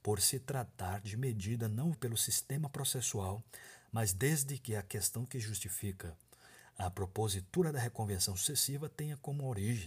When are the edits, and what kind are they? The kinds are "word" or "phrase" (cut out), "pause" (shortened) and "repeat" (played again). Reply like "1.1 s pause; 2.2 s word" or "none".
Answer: 1.9 s word